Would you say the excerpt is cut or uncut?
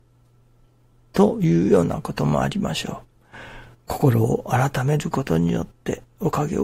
uncut